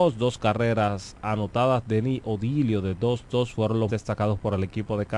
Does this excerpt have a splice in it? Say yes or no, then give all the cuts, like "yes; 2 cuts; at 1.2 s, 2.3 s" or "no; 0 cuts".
yes; 1 cut; at 3.9 s